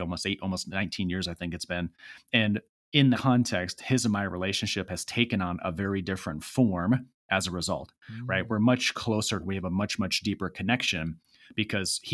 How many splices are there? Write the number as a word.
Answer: two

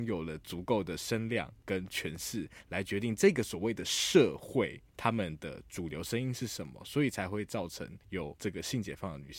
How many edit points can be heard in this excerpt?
one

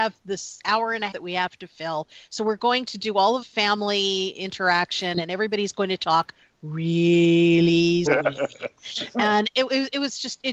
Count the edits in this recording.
three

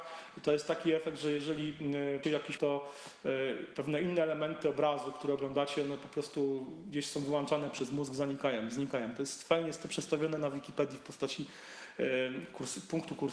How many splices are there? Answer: two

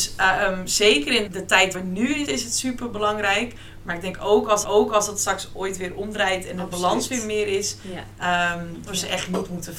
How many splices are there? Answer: five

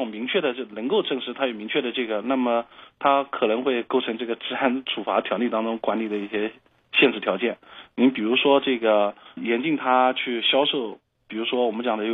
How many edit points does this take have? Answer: one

